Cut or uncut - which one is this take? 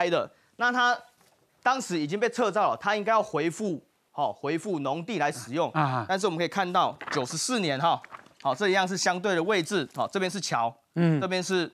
uncut